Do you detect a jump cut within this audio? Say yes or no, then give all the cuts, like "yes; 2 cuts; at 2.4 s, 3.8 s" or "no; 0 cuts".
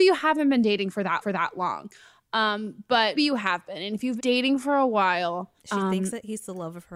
yes; 4 cuts; at 1.2 s, 3.1 s, 4.2 s, 5.6 s